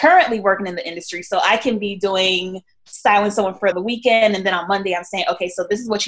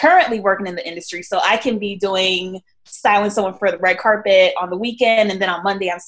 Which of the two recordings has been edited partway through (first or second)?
first